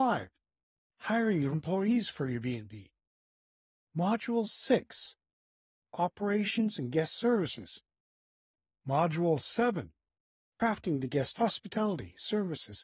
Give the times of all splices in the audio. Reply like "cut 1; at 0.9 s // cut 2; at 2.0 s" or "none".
cut 1; at 1.5 s // cut 2; at 11.3 s